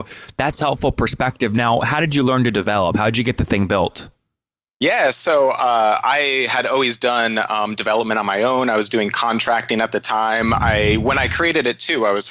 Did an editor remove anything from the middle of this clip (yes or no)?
no